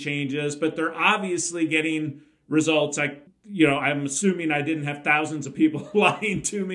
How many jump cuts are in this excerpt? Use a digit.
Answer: 1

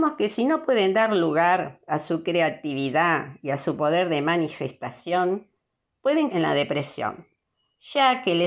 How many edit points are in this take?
1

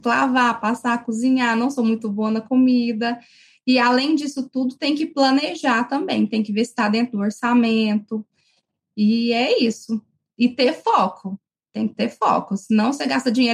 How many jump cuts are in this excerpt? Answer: 0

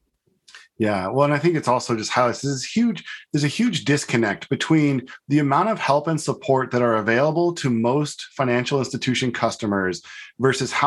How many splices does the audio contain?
0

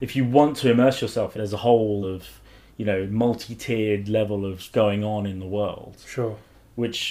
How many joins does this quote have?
3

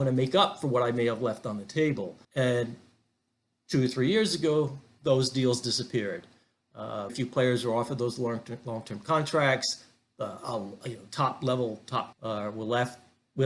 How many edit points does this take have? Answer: 3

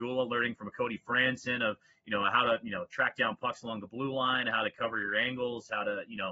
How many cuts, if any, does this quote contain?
0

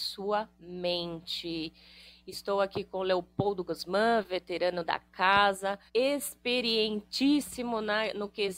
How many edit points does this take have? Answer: 1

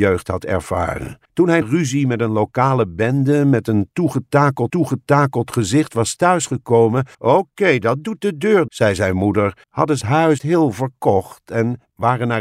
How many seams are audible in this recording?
8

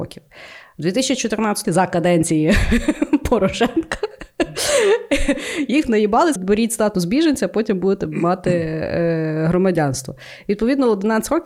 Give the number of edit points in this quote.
3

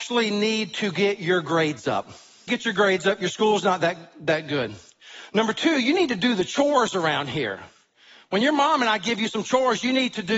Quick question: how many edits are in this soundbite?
1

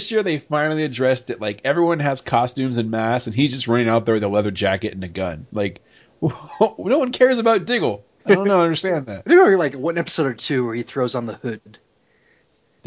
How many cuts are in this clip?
0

